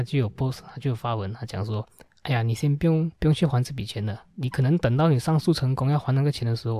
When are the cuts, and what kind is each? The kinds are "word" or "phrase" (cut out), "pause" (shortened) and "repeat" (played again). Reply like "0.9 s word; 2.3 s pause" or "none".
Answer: 1.9 s pause; 3.2 s pause; 4.3 s pause